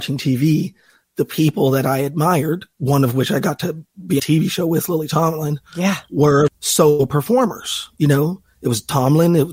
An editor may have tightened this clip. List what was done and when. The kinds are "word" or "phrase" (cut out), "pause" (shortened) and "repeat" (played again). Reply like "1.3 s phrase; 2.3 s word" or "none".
4.2 s phrase; 6.5 s word